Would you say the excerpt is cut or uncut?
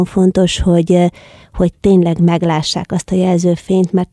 uncut